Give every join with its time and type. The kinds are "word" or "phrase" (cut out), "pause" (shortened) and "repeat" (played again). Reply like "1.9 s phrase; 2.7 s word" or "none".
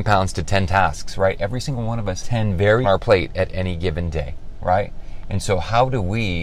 2.2 s word; 2.8 s phrase